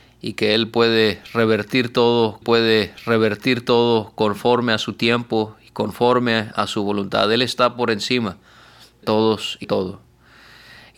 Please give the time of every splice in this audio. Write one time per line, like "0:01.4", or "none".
0:02.4
0:09.0
0:09.6